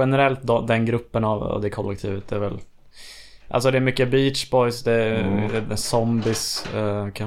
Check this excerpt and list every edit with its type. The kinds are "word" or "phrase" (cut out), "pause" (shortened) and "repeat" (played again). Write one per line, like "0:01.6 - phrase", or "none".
none